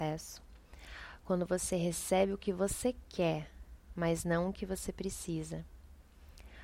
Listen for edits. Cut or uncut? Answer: uncut